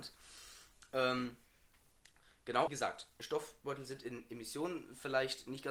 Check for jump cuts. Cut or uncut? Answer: cut